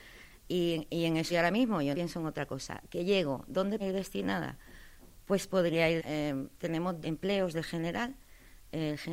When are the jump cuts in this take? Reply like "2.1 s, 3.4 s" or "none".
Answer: 1.3 s, 1.9 s, 3.8 s, 6.0 s, 7.0 s